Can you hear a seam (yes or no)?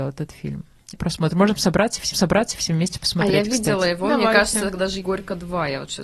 yes